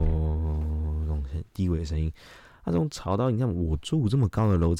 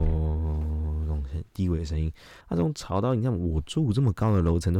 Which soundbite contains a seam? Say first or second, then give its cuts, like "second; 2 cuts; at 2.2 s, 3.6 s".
second; 1 cut; at 2.4 s